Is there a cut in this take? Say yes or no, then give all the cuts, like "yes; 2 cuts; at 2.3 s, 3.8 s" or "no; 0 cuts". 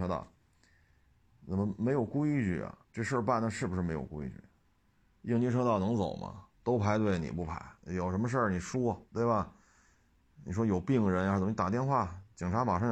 yes; 4 cuts; at 2.8 s, 6.5 s, 7.8 s, 9.1 s